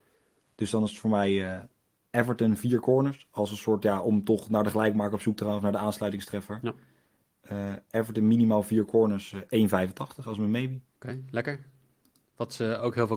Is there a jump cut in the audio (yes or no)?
no